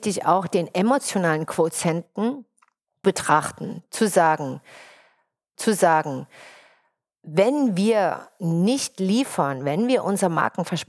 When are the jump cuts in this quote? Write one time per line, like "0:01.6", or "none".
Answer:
0:03.0
0:05.6